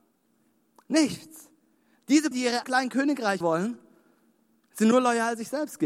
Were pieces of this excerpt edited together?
yes; 3 cuts; at 2.3 s, 2.6 s, 3.4 s

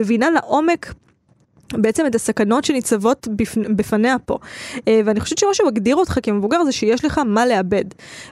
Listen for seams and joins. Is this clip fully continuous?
yes; 0 cuts

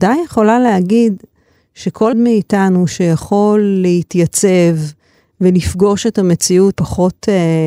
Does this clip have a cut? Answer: yes; 2 cuts; at 2.1 s, 6.7 s

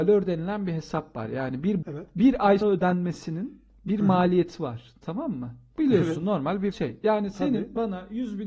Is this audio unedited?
no; 3 cuts; at 1.8 s, 2.6 s, 6.7 s

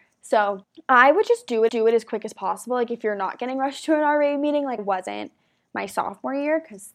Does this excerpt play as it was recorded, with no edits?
no; 2 cuts; at 1.7 s, 4.8 s

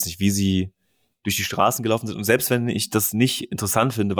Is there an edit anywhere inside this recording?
no; 0 cuts

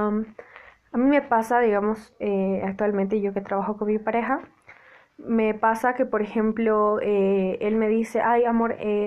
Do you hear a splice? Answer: no; 0 cuts

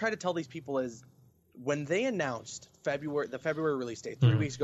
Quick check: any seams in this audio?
no; 0 cuts

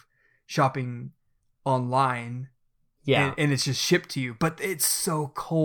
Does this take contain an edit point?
no; 0 cuts

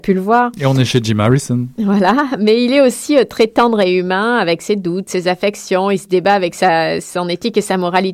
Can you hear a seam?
no; 0 cuts

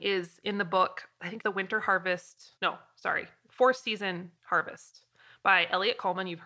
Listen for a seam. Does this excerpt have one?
yes; 3 cuts; at 1.4 s, 2.6 s, 4.4 s

